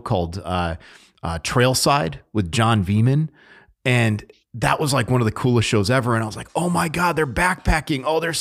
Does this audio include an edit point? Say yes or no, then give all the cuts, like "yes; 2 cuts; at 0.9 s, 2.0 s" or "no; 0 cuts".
no; 0 cuts